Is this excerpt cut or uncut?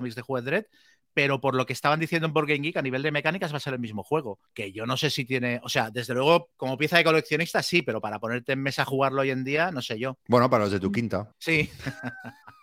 cut